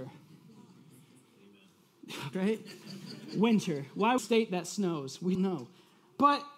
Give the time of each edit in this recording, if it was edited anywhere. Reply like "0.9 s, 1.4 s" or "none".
2.3 s, 4.2 s, 5.3 s